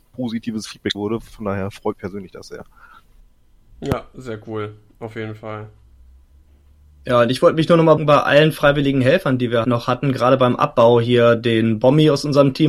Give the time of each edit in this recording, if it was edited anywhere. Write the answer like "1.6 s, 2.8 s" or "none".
0.9 s, 1.9 s, 8.0 s, 9.6 s

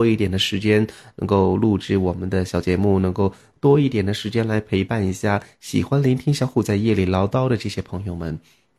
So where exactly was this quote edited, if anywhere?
none

